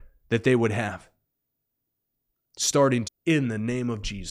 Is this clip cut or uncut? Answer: cut